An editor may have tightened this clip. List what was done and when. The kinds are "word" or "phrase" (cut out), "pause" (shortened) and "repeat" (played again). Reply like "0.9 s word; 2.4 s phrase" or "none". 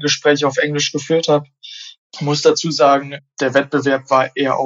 none